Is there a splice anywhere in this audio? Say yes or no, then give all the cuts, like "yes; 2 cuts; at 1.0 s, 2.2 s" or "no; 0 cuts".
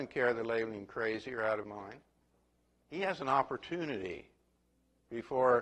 yes; 1 cut; at 1.6 s